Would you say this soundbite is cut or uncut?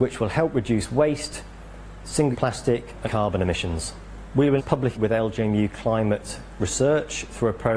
cut